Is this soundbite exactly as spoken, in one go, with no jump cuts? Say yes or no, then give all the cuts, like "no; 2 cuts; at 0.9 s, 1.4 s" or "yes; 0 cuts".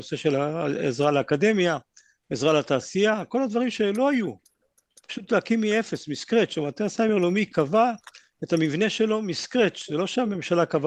yes; 0 cuts